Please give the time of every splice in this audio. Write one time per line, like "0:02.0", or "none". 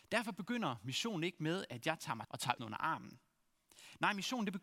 0:02.2
0:02.6